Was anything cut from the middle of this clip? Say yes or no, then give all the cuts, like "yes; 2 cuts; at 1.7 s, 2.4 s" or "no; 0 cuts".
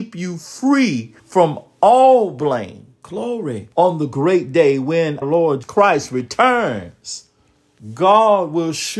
yes; 4 cuts; at 1.2 s, 3.7 s, 5.2 s, 5.6 s